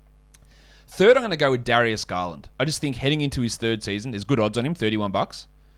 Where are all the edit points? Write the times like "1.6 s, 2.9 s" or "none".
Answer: 2.5 s